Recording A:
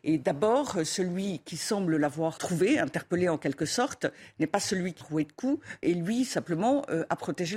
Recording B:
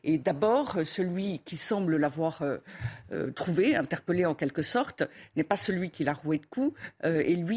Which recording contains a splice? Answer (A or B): A